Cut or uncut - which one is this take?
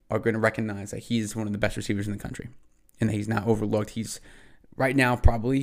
uncut